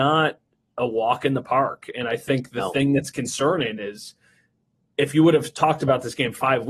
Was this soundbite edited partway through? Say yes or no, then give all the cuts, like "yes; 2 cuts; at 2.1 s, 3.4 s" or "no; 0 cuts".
no; 0 cuts